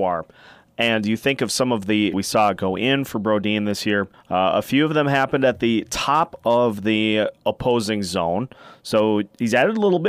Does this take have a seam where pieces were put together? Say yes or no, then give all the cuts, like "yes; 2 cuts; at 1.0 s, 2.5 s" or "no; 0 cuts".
yes; 3 cuts; at 2.1 s, 4.1 s, 7.4 s